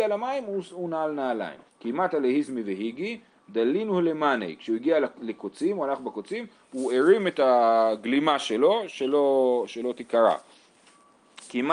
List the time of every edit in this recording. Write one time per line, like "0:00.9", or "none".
0:01.7